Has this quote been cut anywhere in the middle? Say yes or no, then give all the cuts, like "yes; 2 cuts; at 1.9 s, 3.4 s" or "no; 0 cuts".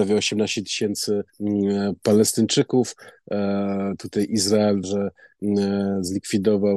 yes; 2 cuts; at 1.3 s, 4.8 s